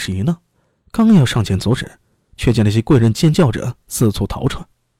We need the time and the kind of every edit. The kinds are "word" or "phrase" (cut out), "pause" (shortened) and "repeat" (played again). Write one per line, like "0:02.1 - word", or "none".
none